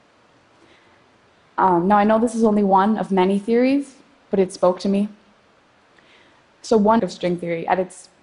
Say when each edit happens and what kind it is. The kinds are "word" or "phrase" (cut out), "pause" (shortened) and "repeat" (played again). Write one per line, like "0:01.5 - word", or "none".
0:07.0 - word